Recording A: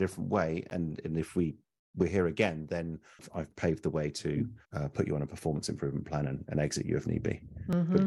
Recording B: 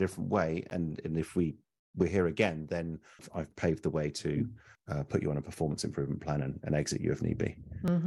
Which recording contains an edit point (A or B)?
A